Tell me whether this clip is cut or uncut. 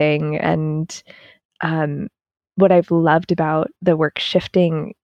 cut